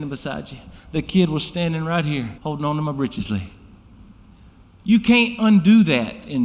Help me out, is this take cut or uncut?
cut